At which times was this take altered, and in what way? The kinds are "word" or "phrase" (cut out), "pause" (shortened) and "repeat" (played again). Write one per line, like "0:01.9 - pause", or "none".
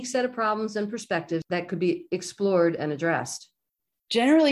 none